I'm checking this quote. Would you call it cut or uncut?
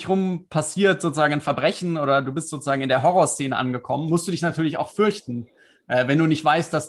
uncut